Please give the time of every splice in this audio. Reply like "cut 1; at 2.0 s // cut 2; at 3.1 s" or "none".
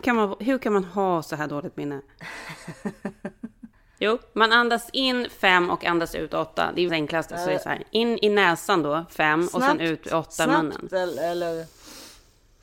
cut 1; at 3.7 s // cut 2; at 6.9 s

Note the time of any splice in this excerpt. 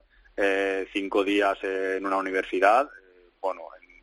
none

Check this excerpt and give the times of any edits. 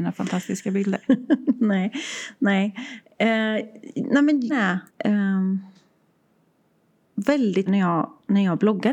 cut 1; at 4.5 s // cut 2; at 4.9 s // cut 3; at 7.7 s

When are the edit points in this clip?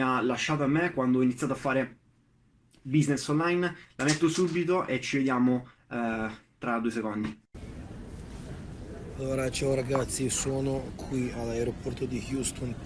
none

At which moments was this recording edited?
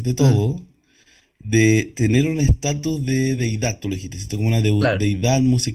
none

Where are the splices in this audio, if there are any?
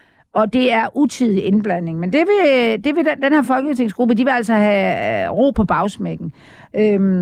none

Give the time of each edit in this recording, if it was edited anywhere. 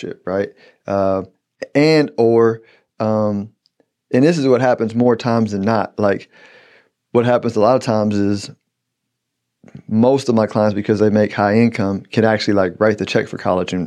none

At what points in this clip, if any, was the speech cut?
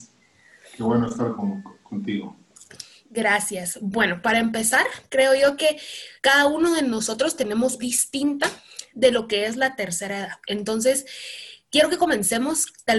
cut 1; at 6.2 s // cut 2; at 7.8 s

